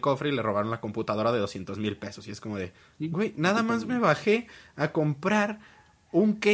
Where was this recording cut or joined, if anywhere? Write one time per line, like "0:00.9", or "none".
0:02.8